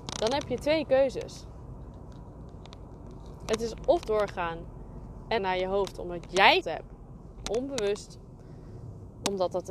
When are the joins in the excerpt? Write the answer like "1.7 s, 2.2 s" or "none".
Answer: 4.0 s, 5.4 s, 6.6 s